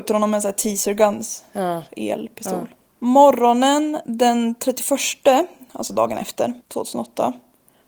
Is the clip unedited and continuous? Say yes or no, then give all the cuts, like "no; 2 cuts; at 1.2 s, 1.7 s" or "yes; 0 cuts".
no; 2 cuts; at 2.9 s, 6.6 s